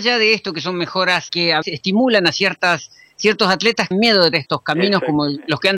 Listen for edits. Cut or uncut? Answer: cut